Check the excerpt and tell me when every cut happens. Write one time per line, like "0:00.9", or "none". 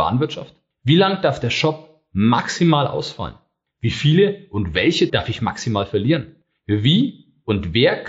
0:05.1

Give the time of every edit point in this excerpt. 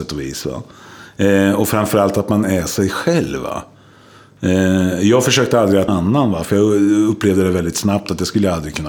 0:05.9

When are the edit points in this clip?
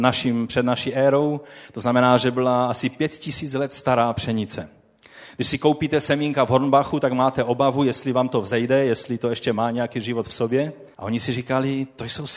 0:10.9

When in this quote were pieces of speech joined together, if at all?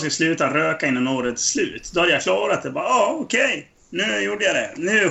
none

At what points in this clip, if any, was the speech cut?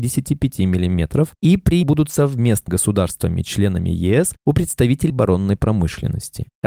0:01.8
0:02.7
0:05.1

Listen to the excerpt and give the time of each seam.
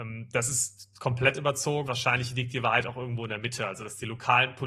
0:01.9

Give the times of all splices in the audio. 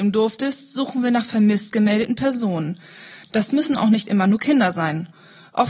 none

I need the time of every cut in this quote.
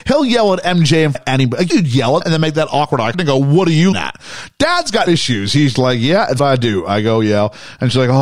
0:01.1
0:01.7
0:02.2
0:03.1
0:03.9
0:05.1
0:05.7
0:06.4

